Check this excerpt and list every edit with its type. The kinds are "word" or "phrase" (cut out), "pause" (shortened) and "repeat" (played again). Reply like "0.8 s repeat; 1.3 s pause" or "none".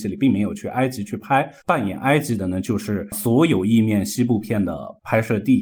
1.6 s pause